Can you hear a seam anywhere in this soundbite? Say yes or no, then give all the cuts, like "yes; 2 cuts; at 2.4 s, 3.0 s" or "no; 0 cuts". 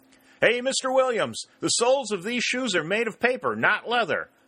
no; 0 cuts